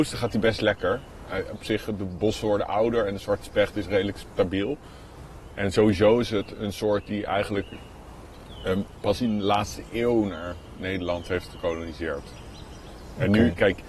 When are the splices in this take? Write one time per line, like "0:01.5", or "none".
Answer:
none